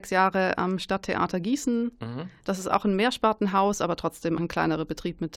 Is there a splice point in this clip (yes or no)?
yes